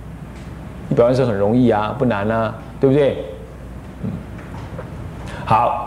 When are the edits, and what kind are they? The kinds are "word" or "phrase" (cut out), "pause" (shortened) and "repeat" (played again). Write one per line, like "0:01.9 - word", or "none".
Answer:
none